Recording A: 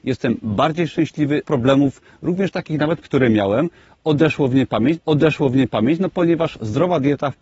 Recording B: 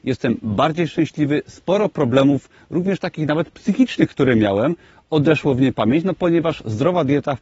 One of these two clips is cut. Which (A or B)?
A